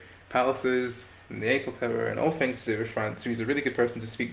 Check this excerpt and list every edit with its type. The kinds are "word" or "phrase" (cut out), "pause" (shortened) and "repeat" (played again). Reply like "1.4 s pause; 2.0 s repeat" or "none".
none